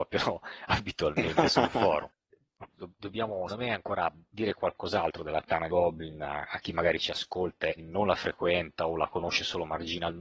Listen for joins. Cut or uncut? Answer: cut